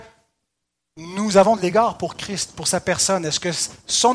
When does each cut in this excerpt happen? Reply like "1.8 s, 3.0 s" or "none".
none